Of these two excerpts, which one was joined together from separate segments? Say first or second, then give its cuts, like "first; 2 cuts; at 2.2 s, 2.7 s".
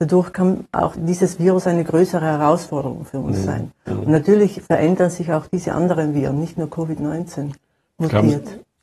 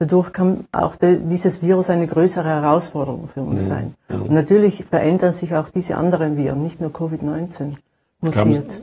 first; 1 cut; at 0.9 s